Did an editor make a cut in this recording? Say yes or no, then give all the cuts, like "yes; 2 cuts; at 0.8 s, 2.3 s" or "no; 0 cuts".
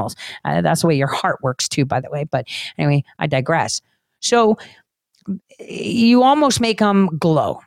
no; 0 cuts